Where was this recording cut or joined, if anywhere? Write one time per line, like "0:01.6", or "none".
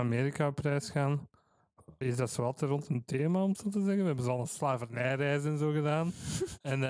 0:02.0